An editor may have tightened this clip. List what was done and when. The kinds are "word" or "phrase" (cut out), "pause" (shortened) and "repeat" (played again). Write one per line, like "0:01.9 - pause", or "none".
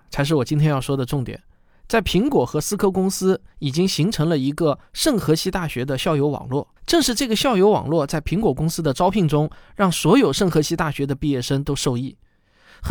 0:06.8 - pause